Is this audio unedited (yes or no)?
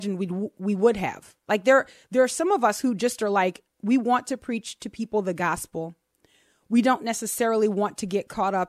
yes